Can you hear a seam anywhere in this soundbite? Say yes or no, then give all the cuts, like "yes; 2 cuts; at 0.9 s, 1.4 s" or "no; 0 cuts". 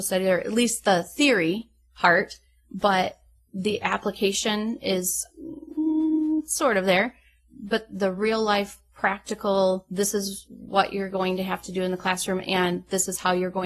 no; 0 cuts